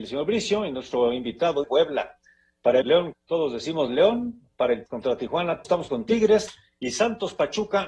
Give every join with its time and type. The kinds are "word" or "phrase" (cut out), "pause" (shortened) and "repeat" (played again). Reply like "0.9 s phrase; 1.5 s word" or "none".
1.6 s word; 2.8 s word; 3.1 s word; 4.9 s word; 5.6 s word